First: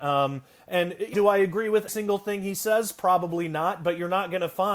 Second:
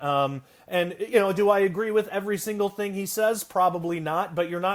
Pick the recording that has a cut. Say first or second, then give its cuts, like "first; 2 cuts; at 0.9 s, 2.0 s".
first; 2 cuts; at 1.1 s, 1.9 s